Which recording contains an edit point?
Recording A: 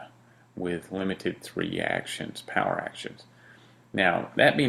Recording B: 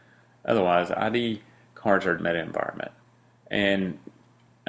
B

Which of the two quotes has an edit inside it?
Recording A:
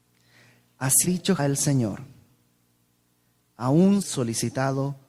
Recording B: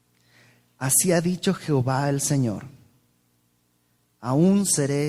A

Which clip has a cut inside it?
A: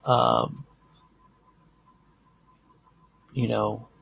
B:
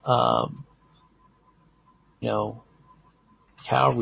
B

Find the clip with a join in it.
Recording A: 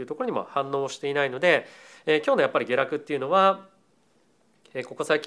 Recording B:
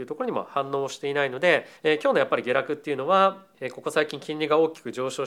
B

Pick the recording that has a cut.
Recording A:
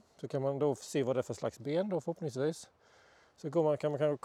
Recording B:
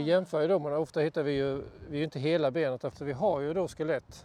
B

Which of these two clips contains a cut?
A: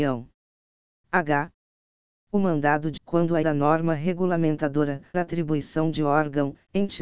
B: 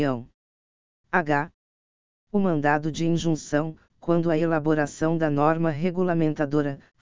A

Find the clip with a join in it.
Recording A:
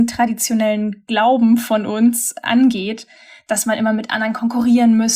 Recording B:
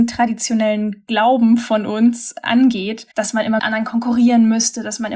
B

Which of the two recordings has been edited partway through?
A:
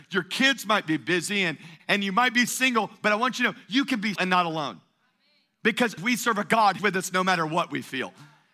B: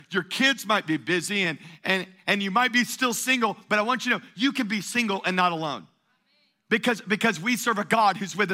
A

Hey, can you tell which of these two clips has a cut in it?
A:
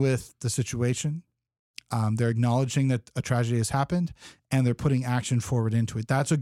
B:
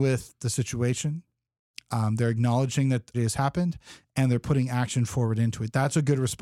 B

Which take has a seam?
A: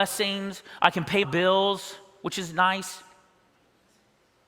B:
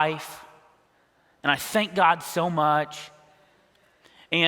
A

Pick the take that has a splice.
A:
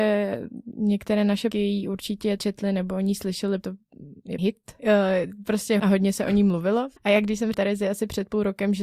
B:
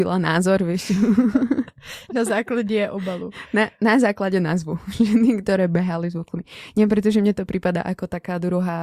A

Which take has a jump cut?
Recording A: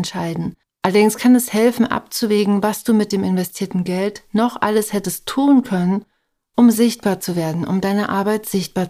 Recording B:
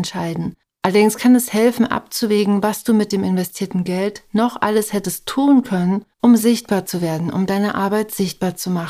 B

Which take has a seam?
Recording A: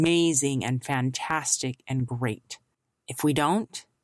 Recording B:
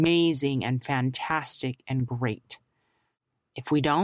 A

